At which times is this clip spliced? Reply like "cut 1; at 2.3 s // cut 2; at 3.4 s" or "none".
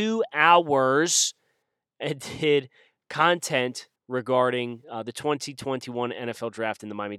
cut 1; at 4.0 s